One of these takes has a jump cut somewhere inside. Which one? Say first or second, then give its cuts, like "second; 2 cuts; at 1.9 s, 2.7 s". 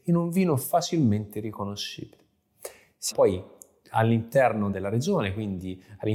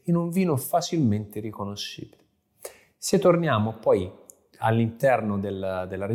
first; 2 cuts; at 3.1 s, 4.7 s